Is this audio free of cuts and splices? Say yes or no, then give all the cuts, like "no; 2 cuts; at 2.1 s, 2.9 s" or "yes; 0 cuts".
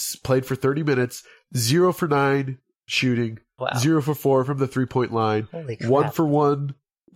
yes; 0 cuts